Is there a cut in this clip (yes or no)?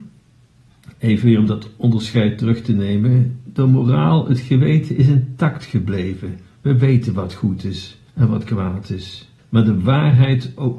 yes